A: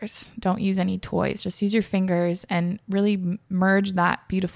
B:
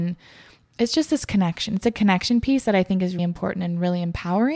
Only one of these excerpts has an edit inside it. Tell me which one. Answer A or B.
B